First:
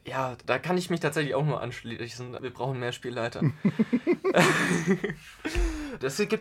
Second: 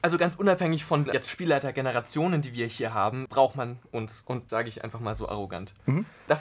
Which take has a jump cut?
second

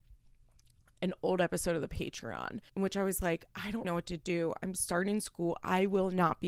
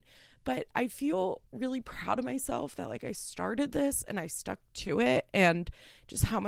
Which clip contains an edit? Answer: first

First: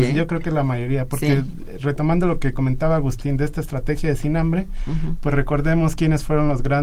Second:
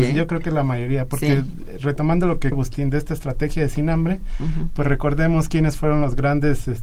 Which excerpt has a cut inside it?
second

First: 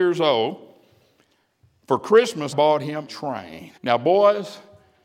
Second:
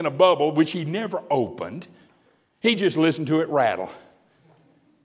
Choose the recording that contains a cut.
first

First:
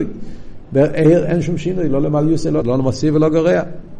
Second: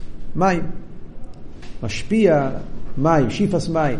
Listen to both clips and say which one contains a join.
first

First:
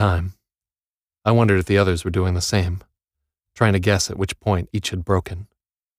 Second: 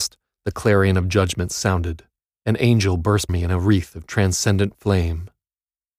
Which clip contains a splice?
second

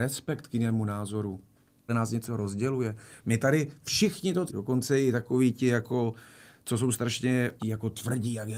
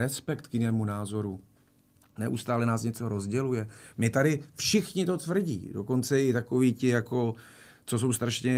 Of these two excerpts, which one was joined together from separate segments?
first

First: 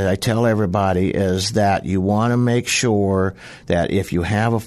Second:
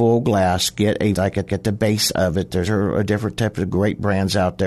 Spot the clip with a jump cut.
second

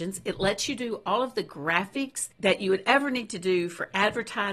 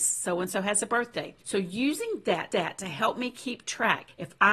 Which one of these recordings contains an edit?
second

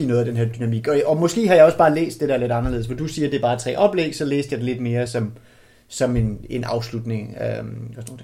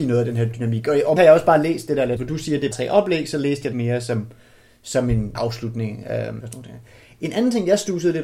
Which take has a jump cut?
second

